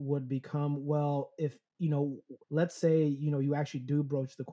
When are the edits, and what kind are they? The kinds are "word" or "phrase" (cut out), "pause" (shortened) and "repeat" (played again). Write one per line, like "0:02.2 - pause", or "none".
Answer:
0:01.7 - pause
0:02.4 - pause